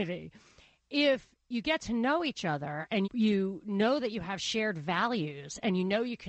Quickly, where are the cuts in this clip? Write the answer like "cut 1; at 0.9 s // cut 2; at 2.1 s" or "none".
cut 1; at 3.0 s